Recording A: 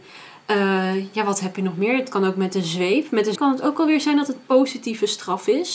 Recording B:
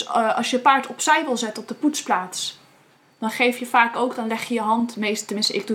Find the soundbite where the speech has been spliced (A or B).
A